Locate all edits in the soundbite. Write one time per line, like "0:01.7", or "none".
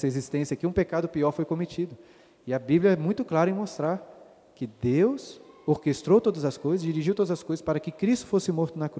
none